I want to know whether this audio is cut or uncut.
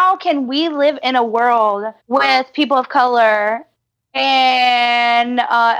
cut